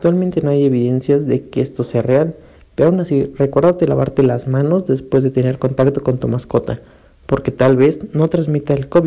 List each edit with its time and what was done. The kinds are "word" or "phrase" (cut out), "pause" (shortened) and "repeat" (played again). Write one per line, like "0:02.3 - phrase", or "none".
none